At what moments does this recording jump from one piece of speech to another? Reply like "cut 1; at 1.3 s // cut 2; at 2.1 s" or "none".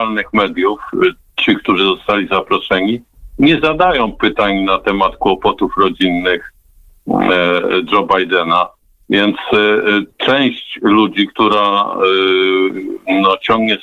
cut 1; at 10.1 s

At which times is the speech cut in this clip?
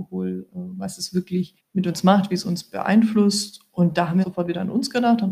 cut 1; at 1.6 s // cut 2; at 4.2 s

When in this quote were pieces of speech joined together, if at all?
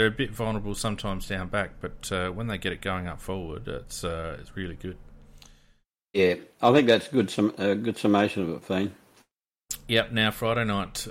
none

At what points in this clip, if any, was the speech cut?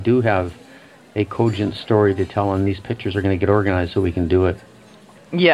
none

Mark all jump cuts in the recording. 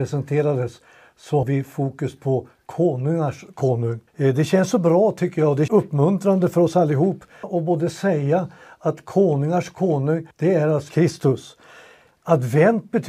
cut 1; at 1.4 s // cut 2; at 4.1 s // cut 3; at 5.7 s // cut 4; at 7.4 s // cut 5; at 10.3 s // cut 6; at 10.9 s

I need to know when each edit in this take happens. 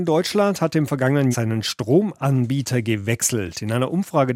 cut 1; at 1.3 s

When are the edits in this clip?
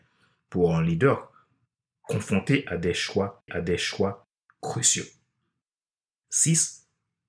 cut 1; at 3.5 s

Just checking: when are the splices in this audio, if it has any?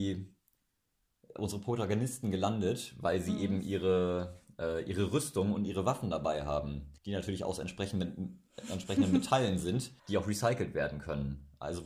cut 1; at 7.0 s // cut 2; at 10.0 s

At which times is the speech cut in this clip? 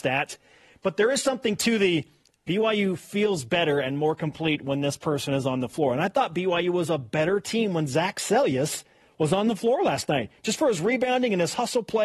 none

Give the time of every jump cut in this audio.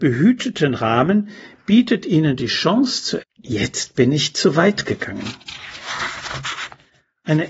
cut 1; at 3.2 s

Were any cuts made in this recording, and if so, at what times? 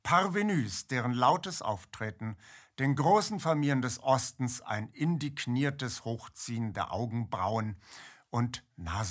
none

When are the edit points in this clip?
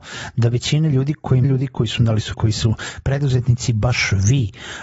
cut 1; at 1.4 s // cut 2; at 2.0 s // cut 3; at 2.3 s

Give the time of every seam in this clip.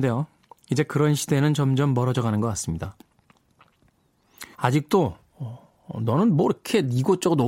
cut 1; at 4.5 s

